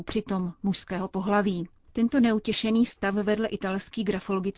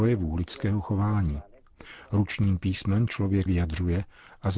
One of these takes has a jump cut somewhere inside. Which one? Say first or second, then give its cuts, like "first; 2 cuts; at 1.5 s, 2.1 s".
second; 2 cuts; at 3.1 s, 3.5 s